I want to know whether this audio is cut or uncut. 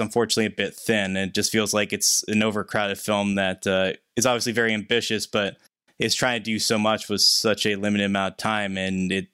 uncut